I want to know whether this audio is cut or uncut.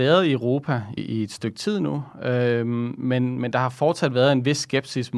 cut